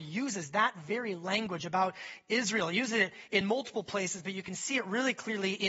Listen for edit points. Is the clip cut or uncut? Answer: uncut